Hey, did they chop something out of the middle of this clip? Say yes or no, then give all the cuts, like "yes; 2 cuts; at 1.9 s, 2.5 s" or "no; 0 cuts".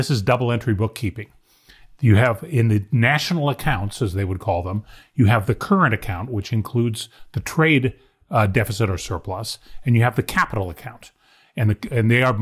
no; 0 cuts